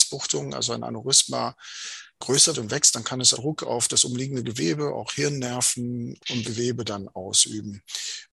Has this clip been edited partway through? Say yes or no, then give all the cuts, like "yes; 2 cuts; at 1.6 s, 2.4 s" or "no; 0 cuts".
yes; 3 cuts; at 2.5 s, 3.3 s, 6.4 s